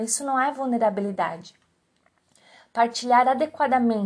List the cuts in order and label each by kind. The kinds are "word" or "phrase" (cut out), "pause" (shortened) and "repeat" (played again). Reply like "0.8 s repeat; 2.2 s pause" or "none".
none